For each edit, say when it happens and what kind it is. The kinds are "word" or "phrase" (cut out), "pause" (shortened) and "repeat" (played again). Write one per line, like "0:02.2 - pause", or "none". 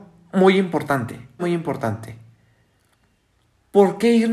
0:01.4 - word